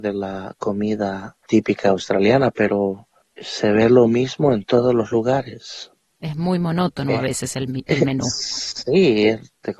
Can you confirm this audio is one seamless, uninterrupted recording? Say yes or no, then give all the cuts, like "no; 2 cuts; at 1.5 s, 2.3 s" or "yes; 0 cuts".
yes; 0 cuts